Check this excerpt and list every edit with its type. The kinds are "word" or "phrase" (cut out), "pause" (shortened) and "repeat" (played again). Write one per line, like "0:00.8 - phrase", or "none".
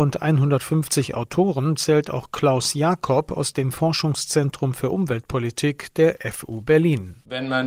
none